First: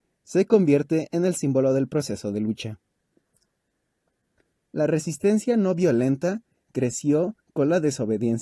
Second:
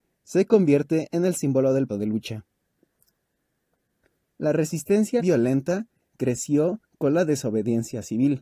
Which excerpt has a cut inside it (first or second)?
second